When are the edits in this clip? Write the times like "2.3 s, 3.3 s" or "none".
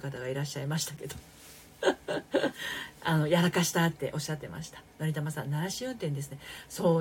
none